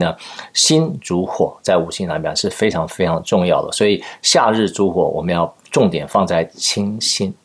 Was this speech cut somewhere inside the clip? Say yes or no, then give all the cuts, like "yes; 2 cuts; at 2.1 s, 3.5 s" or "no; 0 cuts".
no; 0 cuts